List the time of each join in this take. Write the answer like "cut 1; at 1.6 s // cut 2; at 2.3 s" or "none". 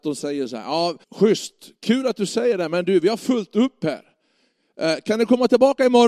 cut 1; at 1.0 s